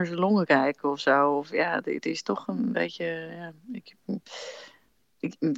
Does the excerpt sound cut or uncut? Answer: uncut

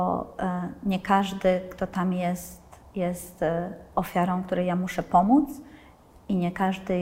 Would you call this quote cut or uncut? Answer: uncut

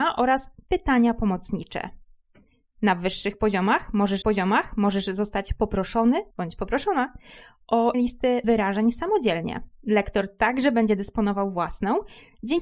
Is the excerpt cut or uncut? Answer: cut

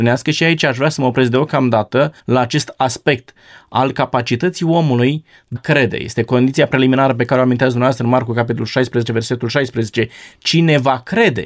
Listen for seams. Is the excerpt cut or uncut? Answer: cut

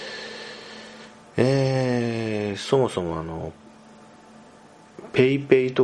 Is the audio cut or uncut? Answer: uncut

